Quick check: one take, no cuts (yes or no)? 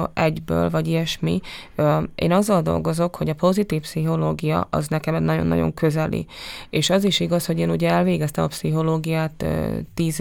yes